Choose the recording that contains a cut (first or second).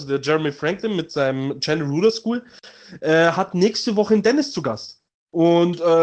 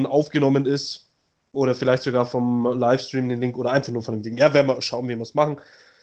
first